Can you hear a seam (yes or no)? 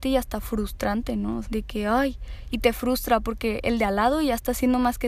yes